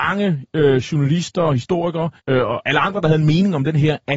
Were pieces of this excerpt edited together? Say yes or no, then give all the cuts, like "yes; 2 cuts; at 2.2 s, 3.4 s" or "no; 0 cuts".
yes; 1 cut; at 2.2 s